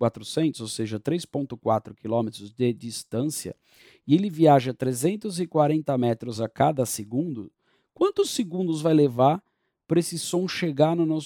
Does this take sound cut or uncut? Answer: uncut